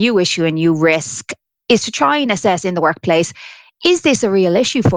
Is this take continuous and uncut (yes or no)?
yes